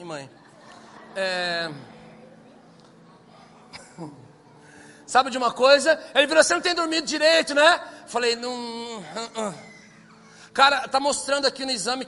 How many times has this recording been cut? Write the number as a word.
zero